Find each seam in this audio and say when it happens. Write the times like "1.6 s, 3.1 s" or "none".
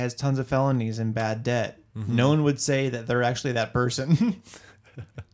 none